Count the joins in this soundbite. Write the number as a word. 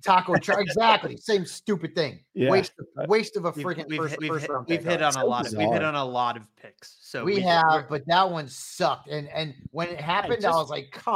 two